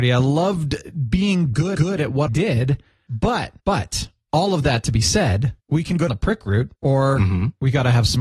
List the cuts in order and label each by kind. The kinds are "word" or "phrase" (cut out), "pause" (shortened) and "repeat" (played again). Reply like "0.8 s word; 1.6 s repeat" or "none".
1.8 s repeat; 2.3 s word; 3.6 s pause; 5.6 s pause; 6.1 s word; 6.8 s pause